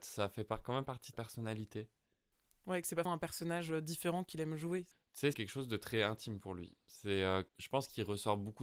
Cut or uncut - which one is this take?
cut